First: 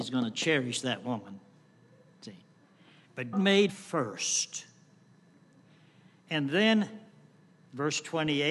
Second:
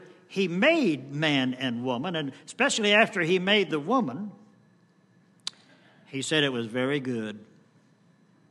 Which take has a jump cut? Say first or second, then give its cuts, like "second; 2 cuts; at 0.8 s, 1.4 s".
first; 2 cuts; at 3.3 s, 3.7 s